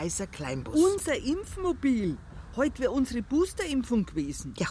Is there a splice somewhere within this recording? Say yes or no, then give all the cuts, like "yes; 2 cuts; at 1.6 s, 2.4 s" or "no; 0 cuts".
no; 0 cuts